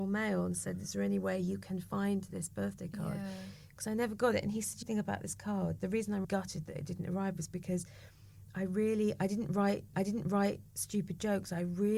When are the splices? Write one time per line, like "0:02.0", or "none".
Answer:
0:04.8
0:06.2
0:09.9